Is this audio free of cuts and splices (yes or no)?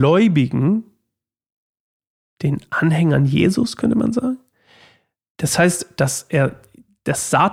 yes